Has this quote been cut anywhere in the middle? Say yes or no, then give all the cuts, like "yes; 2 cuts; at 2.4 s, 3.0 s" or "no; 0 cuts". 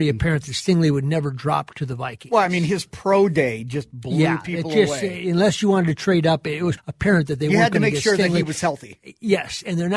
yes; 1 cut; at 6.8 s